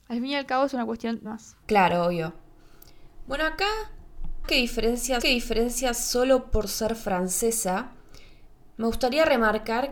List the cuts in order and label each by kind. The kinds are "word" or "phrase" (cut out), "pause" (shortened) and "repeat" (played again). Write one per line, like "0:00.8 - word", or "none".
0:01.3 - phrase
0:01.6 - pause
0:04.4 - word
0:05.2 - repeat